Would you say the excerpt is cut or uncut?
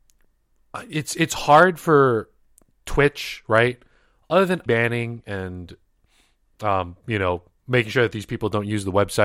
cut